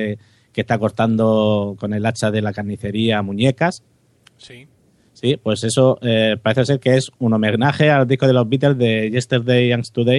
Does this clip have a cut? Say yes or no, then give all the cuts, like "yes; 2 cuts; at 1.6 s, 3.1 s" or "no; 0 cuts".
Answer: no; 0 cuts